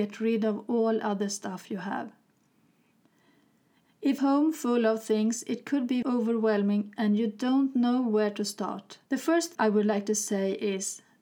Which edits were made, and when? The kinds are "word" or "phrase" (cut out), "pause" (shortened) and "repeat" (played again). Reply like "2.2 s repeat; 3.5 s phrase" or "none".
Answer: 4.2 s phrase; 6.0 s word; 9.0 s pause; 9.5 s word